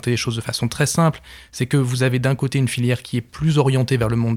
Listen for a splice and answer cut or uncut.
uncut